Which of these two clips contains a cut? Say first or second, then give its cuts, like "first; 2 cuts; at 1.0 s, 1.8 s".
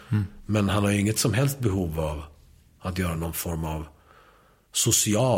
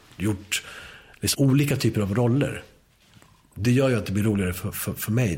second; 2 cuts; at 1.3 s, 3.6 s